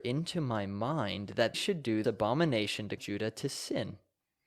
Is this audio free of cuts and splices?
no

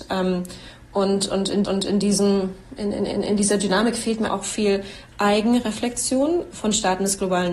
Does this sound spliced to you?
yes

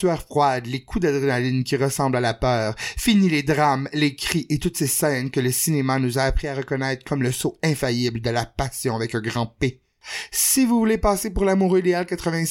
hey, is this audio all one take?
yes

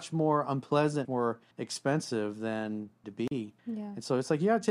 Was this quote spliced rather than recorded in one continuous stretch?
yes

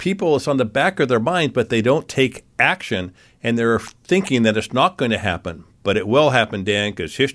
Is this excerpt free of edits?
yes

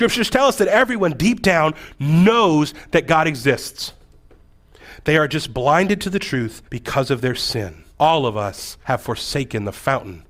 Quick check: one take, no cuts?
no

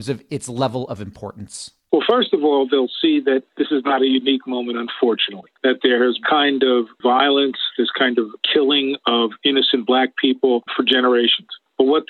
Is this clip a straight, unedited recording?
no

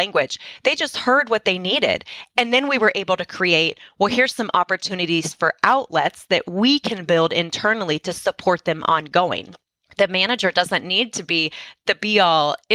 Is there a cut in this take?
no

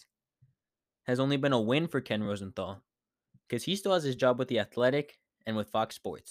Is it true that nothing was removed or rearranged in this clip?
yes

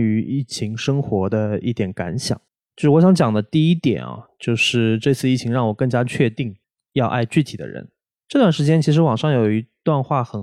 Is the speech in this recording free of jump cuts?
no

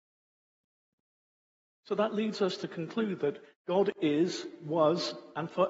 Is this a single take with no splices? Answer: yes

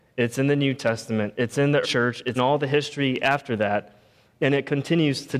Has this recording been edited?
yes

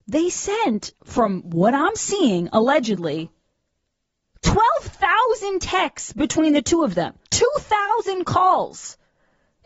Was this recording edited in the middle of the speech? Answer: yes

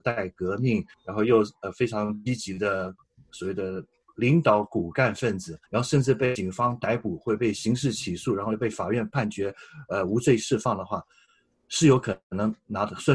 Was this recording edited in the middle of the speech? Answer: yes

